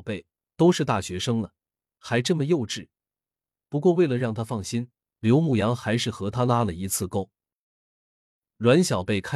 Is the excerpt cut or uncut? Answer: uncut